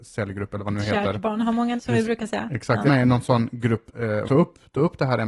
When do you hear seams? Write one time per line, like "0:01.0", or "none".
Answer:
0:01.8
0:02.9
0:03.9
0:04.2

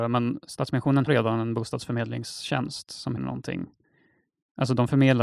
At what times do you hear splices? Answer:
0:01.1
0:03.2

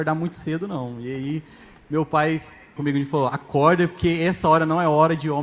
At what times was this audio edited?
0:02.8

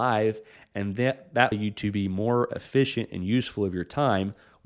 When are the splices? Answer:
0:01.5

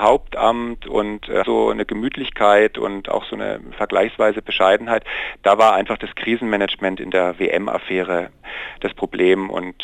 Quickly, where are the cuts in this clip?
0:01.4

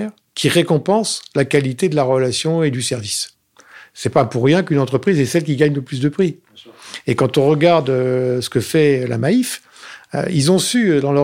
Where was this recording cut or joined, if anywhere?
none

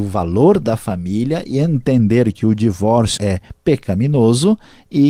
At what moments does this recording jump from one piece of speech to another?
0:03.2

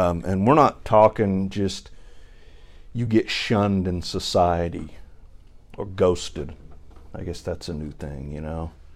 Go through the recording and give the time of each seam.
none

